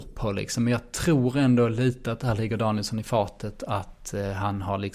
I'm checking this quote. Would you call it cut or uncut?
uncut